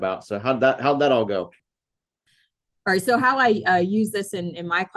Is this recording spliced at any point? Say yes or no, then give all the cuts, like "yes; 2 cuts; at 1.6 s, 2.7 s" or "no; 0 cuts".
no; 0 cuts